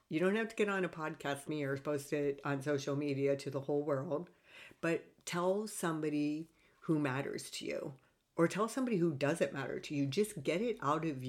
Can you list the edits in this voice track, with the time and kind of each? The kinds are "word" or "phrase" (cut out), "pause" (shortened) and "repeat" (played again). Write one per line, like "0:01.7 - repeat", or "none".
0:01.4 - word